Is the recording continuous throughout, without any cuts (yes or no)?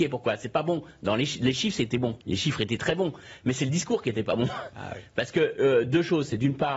no